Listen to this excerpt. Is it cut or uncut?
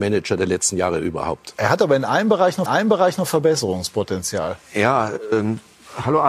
cut